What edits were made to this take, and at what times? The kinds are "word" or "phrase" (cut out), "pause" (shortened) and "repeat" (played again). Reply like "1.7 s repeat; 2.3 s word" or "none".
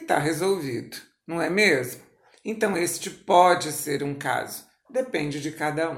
none